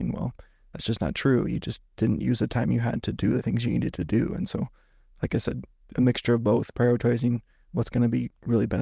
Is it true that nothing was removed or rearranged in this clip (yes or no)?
yes